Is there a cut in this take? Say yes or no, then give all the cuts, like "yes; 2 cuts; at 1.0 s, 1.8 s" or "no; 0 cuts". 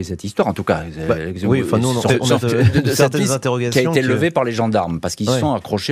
yes; 2 cuts; at 2.1 s, 2.4 s